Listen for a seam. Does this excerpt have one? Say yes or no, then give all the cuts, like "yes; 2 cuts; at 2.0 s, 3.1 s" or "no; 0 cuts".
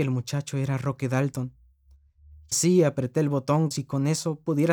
yes; 2 cuts; at 2.5 s, 3.7 s